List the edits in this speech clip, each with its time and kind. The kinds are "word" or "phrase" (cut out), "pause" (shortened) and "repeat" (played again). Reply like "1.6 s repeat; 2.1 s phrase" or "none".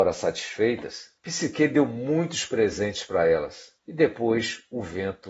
1.2 s pause; 3.8 s pause